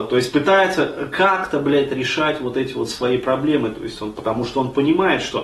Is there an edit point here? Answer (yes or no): no